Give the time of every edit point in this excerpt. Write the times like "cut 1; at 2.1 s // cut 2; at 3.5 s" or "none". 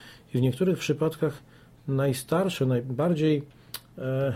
none